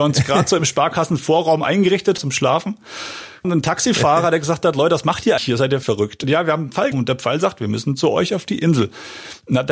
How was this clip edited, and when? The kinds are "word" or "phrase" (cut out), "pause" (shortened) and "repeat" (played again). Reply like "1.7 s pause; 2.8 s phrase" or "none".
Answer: 2.2 s word; 3.4 s word; 5.4 s word; 5.8 s word; 6.2 s word; 6.9 s word